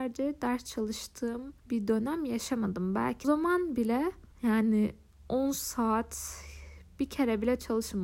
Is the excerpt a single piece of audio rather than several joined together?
no; 3 cuts; at 1.6 s, 3.2 s, 4.3 s

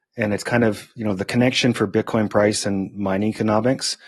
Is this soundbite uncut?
yes; 0 cuts

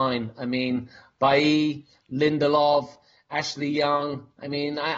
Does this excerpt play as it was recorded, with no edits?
yes; 0 cuts

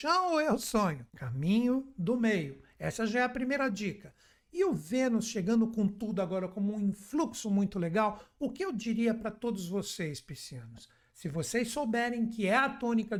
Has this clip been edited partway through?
yes; 1 cut; at 1.1 s

